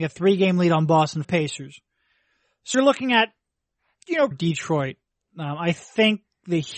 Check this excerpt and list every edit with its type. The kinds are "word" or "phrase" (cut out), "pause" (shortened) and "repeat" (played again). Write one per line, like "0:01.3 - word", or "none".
0:01.2 - phrase
0:02.7 - word
0:04.3 - phrase